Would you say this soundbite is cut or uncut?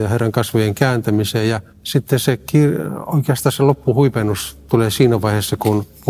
cut